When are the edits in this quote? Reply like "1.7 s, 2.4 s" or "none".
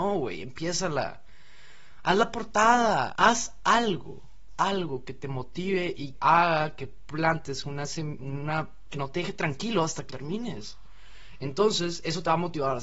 3.1 s, 4.5 s, 6.1 s, 8.9 s, 10.1 s